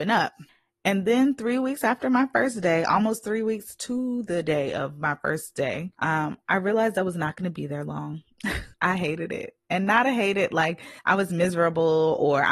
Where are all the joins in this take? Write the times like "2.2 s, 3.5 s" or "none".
5.9 s, 8.7 s, 11.0 s